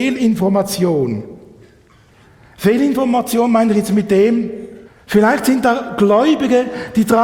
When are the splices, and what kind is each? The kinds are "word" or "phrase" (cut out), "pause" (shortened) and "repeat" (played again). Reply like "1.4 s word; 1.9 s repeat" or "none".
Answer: 4.8 s pause